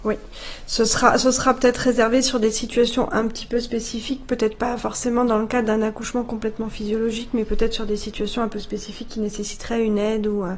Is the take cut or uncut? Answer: uncut